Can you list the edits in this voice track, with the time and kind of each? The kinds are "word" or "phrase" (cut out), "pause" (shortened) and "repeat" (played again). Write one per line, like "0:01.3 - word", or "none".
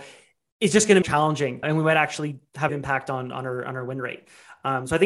0:01.0 - phrase
0:01.6 - word
0:02.7 - phrase